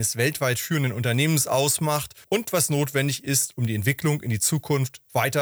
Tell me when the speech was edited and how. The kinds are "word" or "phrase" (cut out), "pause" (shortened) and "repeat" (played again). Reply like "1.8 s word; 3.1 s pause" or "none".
2.2 s pause